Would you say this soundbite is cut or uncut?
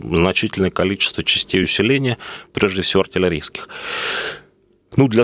uncut